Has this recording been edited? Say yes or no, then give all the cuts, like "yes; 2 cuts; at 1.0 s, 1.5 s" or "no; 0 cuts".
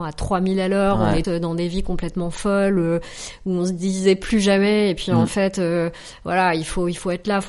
yes; 1 cut; at 1.2 s